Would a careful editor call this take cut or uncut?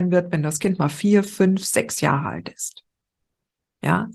uncut